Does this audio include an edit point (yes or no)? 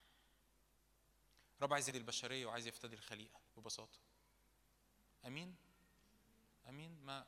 yes